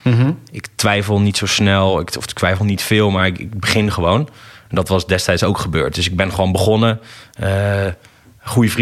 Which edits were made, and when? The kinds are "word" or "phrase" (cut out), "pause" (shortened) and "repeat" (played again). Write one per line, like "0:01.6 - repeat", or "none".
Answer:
none